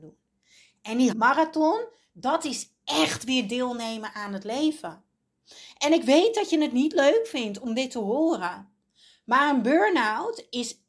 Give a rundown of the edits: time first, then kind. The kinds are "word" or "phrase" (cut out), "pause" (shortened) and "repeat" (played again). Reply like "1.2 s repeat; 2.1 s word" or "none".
1.1 s phrase

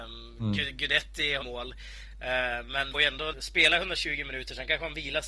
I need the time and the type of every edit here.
1.4 s phrase; 2.9 s word; 3.3 s word

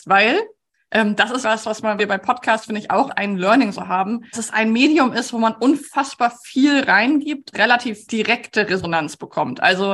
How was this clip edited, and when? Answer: 1.4 s word; 2.0 s word; 3.1 s word; 4.3 s word; 7.5 s word; 8.0 s word

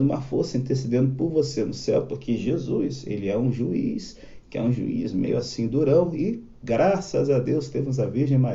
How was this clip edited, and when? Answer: none

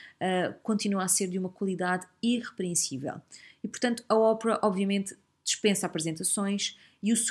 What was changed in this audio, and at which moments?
none

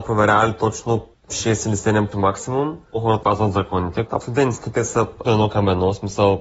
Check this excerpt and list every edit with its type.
2.1 s word; 3.2 s word; 4.2 s word; 5.2 s word

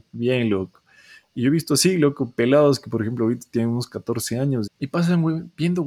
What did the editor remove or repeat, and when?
4.7 s word

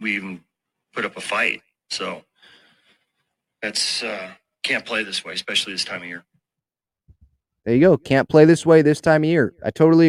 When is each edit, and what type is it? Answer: none

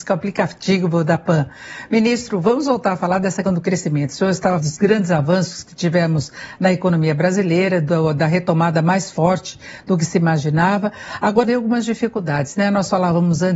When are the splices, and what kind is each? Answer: 3.5 s word; 4.6 s word; 11.4 s phrase

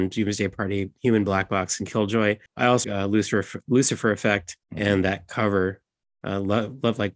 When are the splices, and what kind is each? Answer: 2.5 s pause; 2.8 s phrase; 4.6 s pause

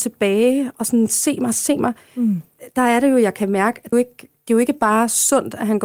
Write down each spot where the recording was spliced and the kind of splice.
1.8 s phrase; 3.9 s phrase; 4.4 s pause

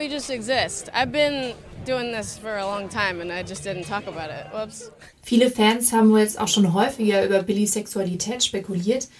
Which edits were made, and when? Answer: 5.1 s pause

